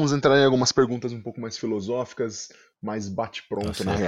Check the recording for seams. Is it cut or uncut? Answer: uncut